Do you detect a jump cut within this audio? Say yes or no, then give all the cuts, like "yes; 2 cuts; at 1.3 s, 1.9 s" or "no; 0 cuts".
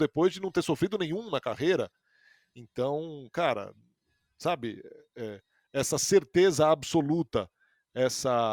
no; 0 cuts